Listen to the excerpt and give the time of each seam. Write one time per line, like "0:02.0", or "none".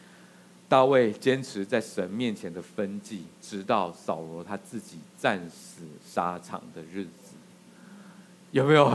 0:03.3